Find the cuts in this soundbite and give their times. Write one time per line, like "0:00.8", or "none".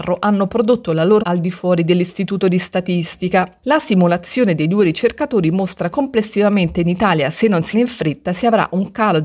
0:01.2
0:05.9
0:07.7